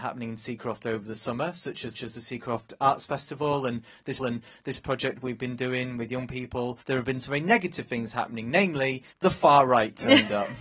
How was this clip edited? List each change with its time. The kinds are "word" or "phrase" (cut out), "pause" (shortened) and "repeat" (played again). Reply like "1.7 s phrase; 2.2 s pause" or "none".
2.0 s repeat; 4.2 s repeat; 6.8 s pause; 9.1 s pause